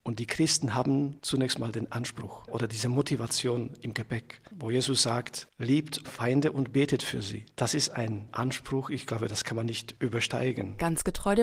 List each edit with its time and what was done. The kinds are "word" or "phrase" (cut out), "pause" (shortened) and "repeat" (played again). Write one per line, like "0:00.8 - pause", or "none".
0:06.0 - word